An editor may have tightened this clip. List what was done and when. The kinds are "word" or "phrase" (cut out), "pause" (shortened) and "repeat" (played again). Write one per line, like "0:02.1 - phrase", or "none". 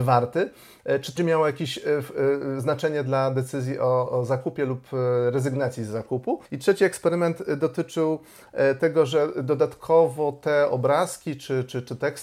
0:01.2 - word
0:04.1 - word
0:06.5 - pause